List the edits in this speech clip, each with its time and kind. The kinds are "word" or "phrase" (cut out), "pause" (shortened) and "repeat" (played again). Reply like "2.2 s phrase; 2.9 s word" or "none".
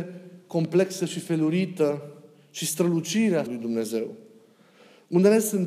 3.5 s word